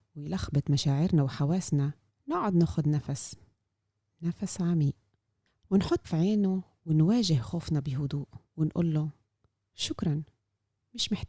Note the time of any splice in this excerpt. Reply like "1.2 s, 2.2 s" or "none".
2.1 s, 6.0 s, 8.4 s